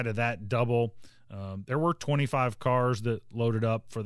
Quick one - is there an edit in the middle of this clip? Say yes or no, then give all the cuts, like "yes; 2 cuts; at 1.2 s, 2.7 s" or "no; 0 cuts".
no; 0 cuts